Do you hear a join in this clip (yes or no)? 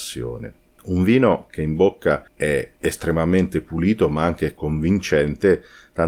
yes